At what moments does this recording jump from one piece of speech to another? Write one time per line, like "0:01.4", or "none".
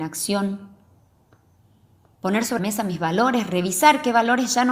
0:02.6